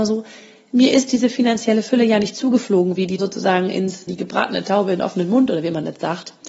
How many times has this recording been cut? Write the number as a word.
two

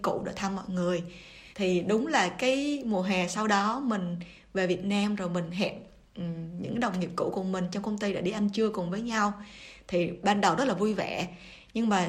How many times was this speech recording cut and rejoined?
one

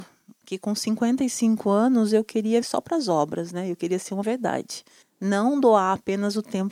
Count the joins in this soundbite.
three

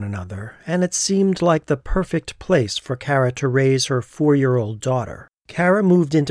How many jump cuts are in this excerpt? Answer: one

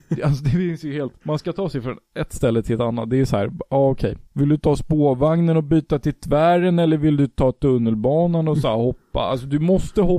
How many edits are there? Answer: two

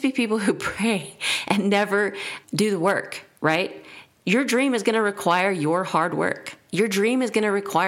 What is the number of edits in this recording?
one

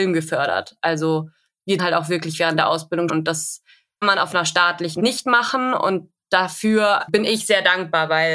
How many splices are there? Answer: five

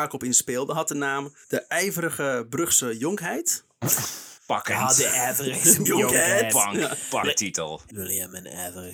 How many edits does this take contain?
five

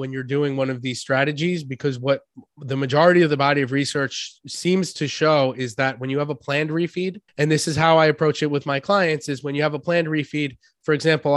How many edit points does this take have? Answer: one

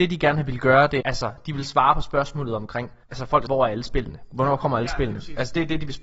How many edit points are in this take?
three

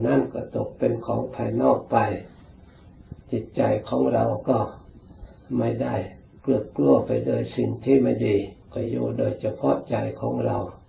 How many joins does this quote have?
three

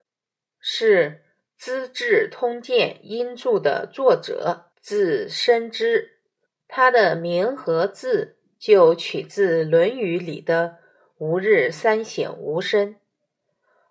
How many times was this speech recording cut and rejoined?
two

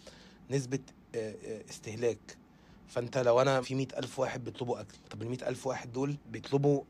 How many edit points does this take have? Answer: one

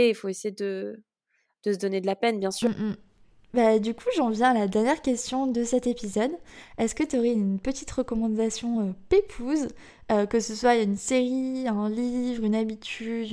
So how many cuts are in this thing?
zero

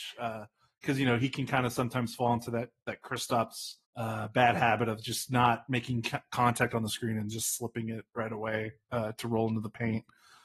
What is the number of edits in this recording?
one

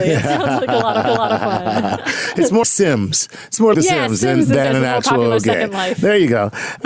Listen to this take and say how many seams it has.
four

